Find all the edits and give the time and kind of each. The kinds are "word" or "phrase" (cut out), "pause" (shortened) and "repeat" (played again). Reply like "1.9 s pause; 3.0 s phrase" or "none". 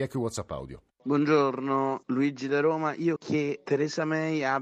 3.2 s word